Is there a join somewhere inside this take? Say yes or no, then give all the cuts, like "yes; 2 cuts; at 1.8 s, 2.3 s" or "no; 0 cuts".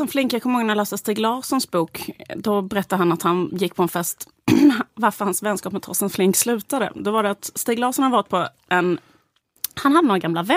no; 0 cuts